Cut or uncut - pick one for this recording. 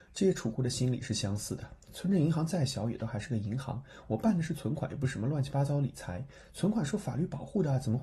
uncut